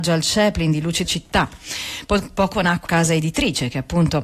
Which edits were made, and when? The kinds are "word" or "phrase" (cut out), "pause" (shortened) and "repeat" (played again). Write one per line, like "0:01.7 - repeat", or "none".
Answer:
0:01.0 - word
0:02.5 - word
0:02.9 - word